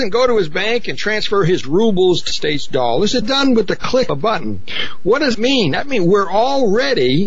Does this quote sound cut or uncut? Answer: cut